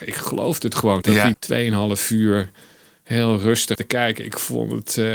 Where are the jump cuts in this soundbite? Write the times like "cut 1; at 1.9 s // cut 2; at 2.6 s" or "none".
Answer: cut 1; at 1.0 s // cut 2; at 1.3 s // cut 3; at 3.8 s